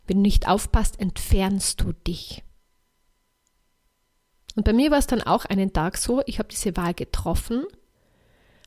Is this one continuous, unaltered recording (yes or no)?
yes